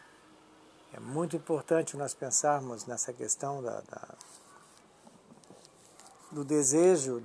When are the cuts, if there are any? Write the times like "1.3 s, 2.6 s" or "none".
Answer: none